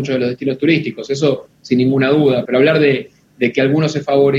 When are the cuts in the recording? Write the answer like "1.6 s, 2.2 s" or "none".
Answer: 2.5 s